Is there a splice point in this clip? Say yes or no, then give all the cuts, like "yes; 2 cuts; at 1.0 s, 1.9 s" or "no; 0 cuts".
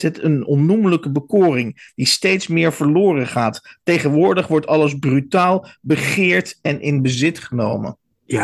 no; 0 cuts